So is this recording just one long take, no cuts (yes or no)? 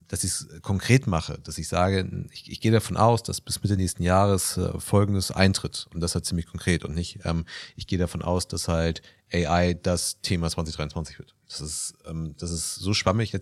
yes